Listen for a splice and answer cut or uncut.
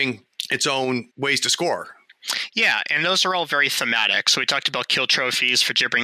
uncut